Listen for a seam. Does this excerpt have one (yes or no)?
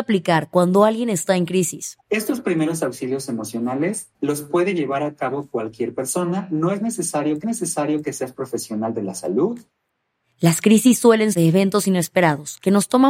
yes